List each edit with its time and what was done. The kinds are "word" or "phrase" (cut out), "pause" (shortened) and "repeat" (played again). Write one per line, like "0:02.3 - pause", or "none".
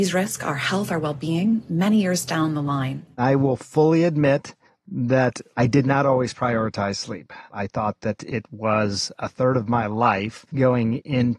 0:03.1 - pause
0:04.7 - pause
0:07.5 - pause
0:10.5 - pause

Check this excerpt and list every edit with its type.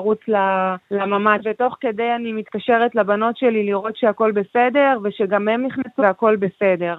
0:06.0 - word

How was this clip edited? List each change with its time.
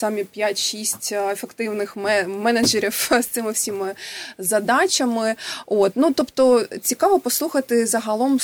none

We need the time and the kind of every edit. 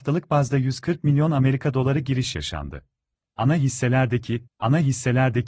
0:04.5 - repeat

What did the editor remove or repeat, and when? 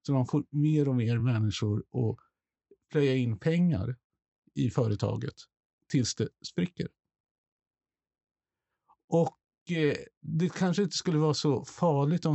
none

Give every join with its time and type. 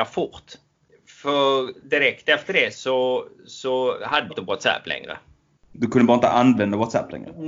0:04.3 - word

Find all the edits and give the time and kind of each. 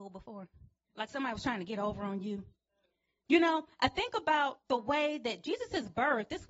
none

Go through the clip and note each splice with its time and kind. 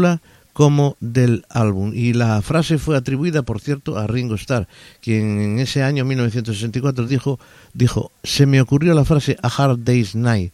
none

